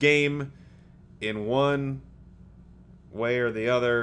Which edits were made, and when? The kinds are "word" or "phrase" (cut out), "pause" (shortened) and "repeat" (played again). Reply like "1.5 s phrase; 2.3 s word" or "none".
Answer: none

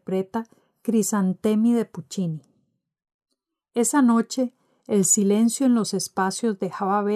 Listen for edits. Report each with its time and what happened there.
none

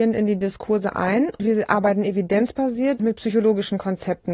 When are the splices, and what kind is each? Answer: 1.4 s word; 3.0 s word

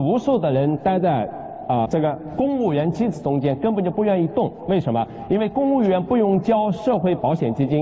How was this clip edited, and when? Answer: 1.9 s word

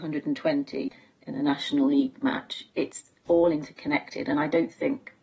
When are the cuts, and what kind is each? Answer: none

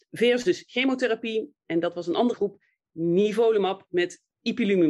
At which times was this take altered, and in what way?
1.6 s word; 2.3 s word

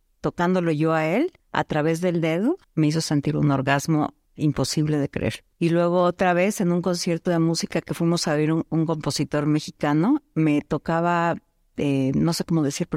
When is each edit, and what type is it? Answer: 1.4 s pause; 2.6 s pause; 4.2 s pause; 5.5 s pause

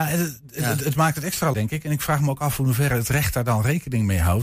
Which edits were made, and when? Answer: 1.5 s word

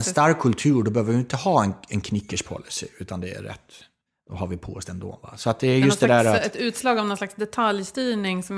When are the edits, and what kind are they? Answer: none

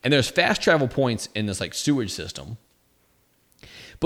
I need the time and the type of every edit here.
none

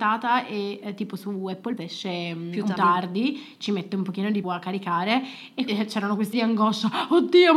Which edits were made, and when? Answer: 1.8 s word; 2.8 s word; 4.4 s word; 5.7 s word; 6.3 s word

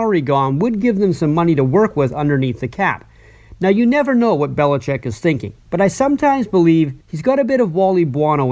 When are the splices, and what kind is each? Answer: 5.6 s pause; 7.0 s pause

